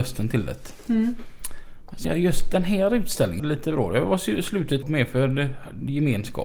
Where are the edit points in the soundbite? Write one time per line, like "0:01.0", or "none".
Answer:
0:02.0
0:03.4
0:04.8